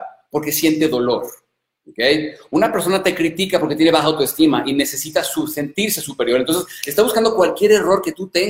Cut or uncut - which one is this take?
uncut